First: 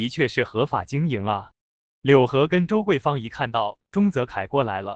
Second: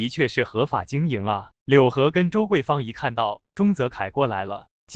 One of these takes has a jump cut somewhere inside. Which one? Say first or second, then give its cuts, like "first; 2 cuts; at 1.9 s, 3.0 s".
second; 1 cut; at 1.6 s